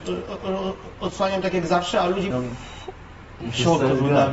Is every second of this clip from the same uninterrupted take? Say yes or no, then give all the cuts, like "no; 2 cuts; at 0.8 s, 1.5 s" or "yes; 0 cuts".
no; 1 cut; at 2.3 s